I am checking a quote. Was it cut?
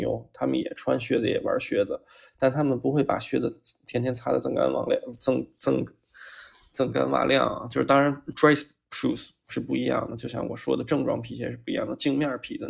no; 0 cuts

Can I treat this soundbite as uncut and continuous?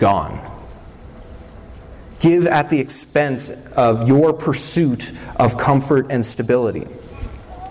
yes; 0 cuts

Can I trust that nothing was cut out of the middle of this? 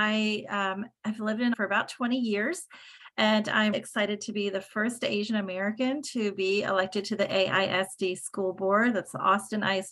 no; 2 cuts; at 1.5 s, 3.7 s

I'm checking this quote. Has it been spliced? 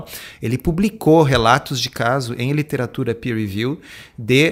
no; 0 cuts

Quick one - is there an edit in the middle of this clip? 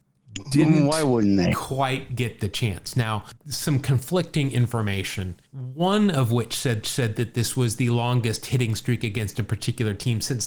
yes; 3 cuts; at 3.4 s, 5.5 s, 6.8 s

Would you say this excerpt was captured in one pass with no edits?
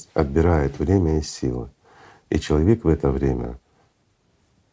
yes; 0 cuts

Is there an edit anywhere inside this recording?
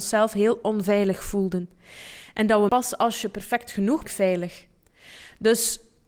yes; 2 cuts; at 2.7 s, 4.0 s

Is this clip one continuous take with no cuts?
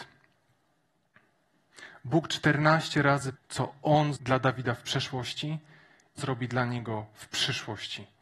no; 3 cuts; at 3.3 s, 4.1 s, 6.2 s

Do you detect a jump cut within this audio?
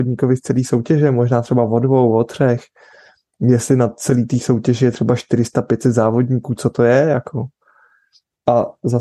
no; 0 cuts

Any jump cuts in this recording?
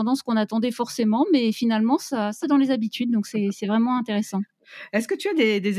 yes; 1 cut; at 2.4 s

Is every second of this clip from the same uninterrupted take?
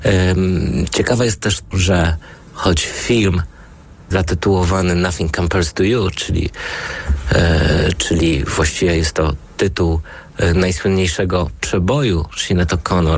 no; 2 cuts; at 1.7 s, 4.1 s

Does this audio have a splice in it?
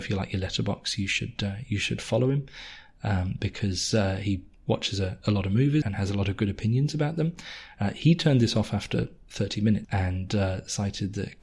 yes; 1 cut; at 5.8 s

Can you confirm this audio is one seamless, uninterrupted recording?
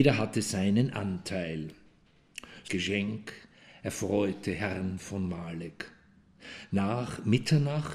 no; 1 cut; at 2.7 s

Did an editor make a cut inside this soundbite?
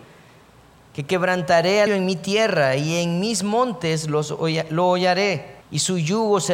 yes; 2 cuts; at 1.9 s, 5.6 s

